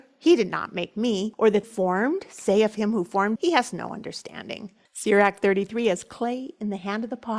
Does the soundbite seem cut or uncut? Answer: cut